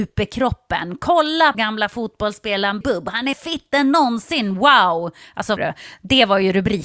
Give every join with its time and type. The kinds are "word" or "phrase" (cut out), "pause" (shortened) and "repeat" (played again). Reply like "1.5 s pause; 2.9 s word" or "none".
1.5 s word; 2.8 s word; 3.3 s word; 5.6 s word